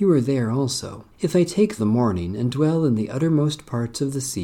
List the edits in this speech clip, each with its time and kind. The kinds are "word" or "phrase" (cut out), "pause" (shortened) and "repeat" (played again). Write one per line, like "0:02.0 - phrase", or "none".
0:01.1 - pause
0:01.8 - phrase